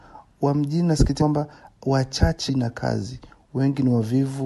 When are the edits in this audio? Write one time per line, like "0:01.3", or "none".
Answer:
0:01.2
0:02.5